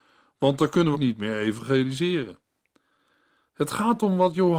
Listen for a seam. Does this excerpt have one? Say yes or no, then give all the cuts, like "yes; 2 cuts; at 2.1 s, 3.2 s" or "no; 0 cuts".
yes; 1 cut; at 0.9 s